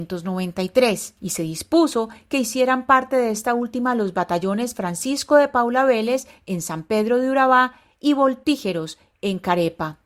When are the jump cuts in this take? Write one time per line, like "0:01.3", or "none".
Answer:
0:01.2